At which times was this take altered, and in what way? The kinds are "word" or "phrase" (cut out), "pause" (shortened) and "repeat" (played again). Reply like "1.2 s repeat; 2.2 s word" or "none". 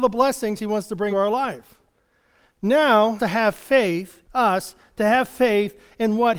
1.1 s word; 3.2 s phrase; 4.2 s pause